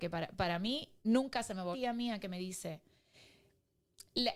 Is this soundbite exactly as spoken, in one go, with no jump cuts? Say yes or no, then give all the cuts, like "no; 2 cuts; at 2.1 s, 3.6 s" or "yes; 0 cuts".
no; 2 cuts; at 1.0 s, 1.7 s